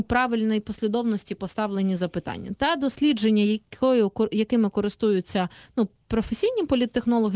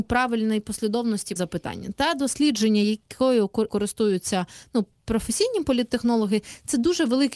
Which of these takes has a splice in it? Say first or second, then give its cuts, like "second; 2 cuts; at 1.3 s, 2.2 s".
second; 2 cuts; at 1.4 s, 3.7 s